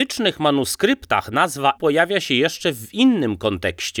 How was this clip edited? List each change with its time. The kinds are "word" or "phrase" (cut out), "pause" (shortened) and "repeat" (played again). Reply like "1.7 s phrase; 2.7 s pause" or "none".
1.7 s word

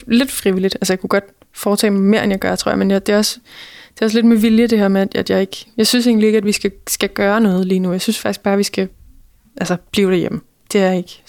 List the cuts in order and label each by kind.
none

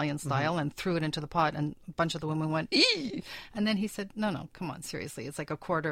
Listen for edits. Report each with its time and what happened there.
none

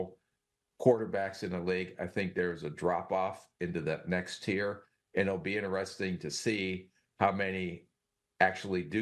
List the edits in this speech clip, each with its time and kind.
none

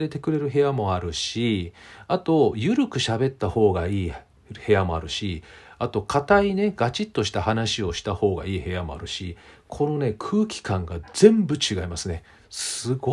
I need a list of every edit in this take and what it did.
none

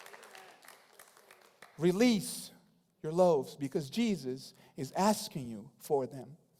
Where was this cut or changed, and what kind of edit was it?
none

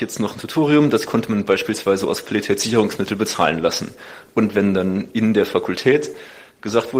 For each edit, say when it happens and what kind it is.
none

